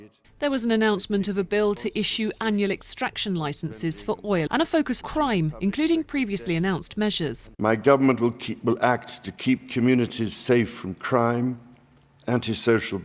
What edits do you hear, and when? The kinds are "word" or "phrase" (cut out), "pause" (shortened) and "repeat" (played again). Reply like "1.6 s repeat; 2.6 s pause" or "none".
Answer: 4.5 s phrase; 5.0 s word; 7.5 s pause